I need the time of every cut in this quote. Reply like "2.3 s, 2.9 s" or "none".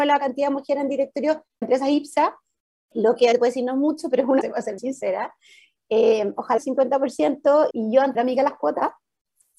1.6 s, 2.9 s, 3.3 s, 4.4 s, 4.8 s, 6.6 s, 7.7 s, 8.1 s